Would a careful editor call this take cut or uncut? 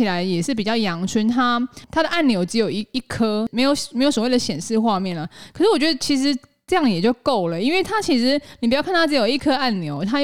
uncut